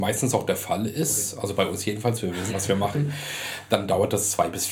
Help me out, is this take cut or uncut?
cut